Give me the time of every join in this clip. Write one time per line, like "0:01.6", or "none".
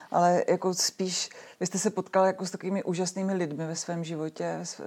none